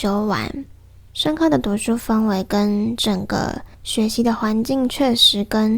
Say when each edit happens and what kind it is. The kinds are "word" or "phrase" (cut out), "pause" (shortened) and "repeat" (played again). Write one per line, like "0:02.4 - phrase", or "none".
0:01.1 - pause
0:03.7 - pause